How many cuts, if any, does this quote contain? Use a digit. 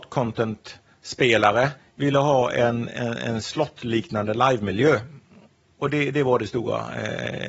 1